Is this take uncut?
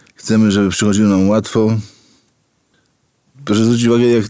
yes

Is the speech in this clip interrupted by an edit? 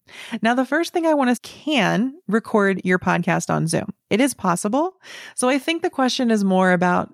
yes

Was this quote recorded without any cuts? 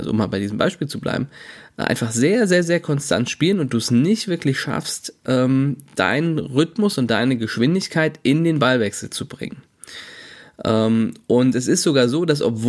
yes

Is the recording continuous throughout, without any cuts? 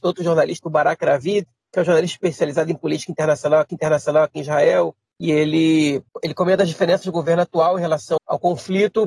no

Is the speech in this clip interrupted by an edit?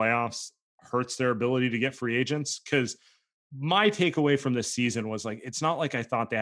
no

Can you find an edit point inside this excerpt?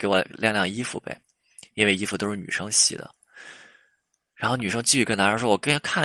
no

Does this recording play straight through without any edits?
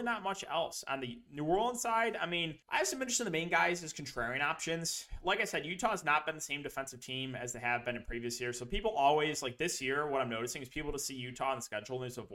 no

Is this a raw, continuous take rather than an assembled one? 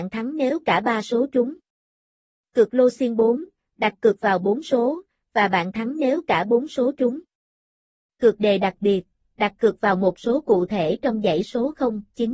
yes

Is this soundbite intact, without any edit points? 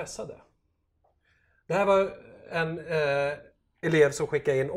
yes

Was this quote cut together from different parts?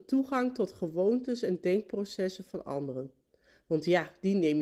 no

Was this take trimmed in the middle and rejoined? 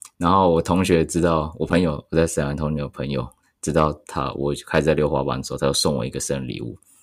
yes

